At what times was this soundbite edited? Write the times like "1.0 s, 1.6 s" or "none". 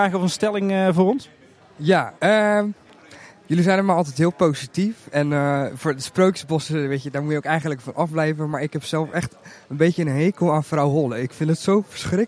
2.2 s